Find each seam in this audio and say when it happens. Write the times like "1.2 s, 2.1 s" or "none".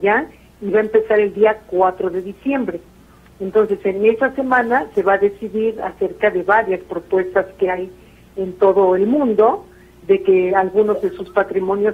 none